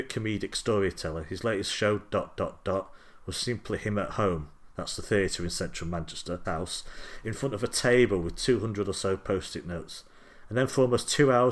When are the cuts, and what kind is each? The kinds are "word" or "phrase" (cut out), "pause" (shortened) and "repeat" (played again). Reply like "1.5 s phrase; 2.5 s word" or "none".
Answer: 6.4 s phrase